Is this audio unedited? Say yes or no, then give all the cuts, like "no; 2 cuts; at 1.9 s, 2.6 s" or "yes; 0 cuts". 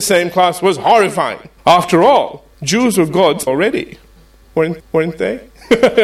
no; 4 cuts; at 1.6 s, 2.5 s, 3.5 s, 4.8 s